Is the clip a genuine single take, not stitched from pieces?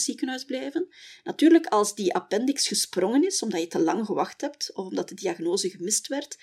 yes; 0 cuts

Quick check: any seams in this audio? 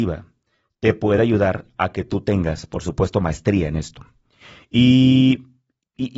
no; 0 cuts

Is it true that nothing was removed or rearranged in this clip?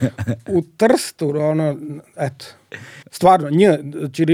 no; 1 cut; at 3.0 s

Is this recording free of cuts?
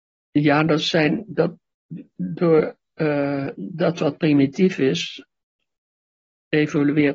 yes; 0 cuts

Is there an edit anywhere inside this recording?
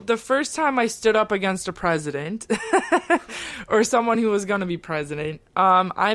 no; 0 cuts

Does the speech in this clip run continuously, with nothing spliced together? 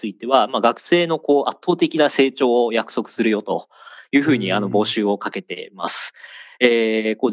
yes; 0 cuts

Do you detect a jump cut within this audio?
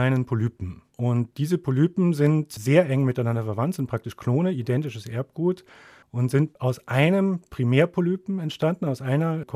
no; 0 cuts

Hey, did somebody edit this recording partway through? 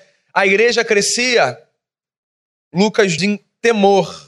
yes; 1 cut; at 3.2 s

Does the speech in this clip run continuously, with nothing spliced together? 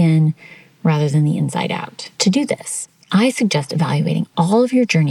no; 1 cut; at 2.1 s

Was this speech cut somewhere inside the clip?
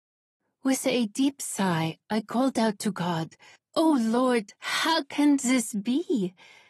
yes; 1 cut; at 3.6 s

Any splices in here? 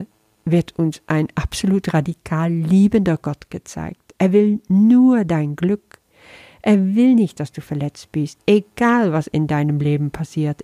no; 0 cuts

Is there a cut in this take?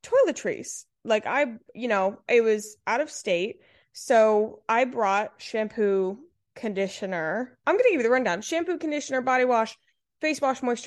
no; 0 cuts

